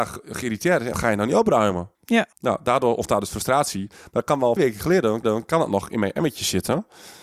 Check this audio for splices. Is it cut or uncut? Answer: cut